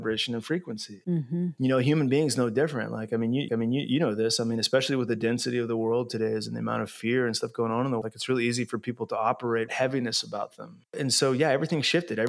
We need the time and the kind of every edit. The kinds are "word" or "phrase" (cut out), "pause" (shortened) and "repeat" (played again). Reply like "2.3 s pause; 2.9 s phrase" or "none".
3.5 s repeat; 8.0 s word; 9.7 s phrase; 10.9 s pause